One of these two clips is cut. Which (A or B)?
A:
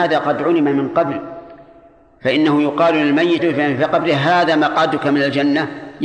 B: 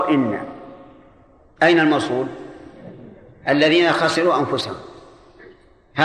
A